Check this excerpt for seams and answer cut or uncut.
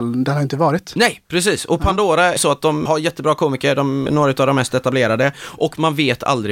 cut